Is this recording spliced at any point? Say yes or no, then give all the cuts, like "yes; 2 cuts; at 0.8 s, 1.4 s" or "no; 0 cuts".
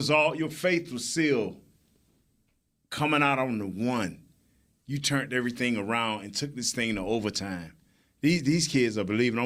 no; 0 cuts